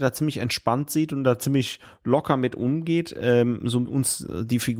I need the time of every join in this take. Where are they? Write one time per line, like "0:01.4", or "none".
0:03.9

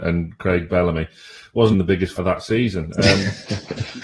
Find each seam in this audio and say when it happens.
0:01.7
0:02.2

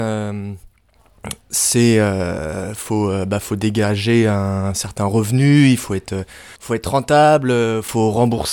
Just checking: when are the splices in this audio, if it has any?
0:06.6

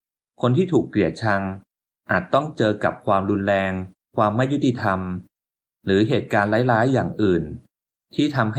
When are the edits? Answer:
0:04.0

